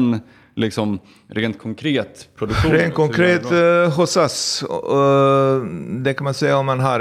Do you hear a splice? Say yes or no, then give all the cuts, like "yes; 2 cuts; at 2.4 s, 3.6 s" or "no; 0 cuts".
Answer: no; 0 cuts